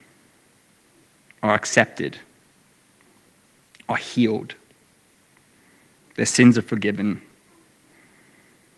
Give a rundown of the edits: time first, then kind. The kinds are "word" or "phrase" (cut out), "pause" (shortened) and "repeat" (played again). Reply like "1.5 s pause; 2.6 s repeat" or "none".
none